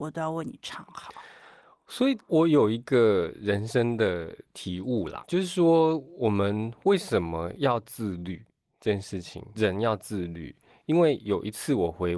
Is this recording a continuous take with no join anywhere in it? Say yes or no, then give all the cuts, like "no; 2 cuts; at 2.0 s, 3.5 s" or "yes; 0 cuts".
no; 2 cuts; at 5.2 s, 9.5 s